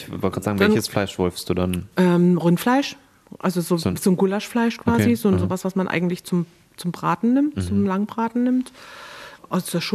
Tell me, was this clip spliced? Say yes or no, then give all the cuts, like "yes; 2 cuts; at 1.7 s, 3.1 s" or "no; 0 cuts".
no; 0 cuts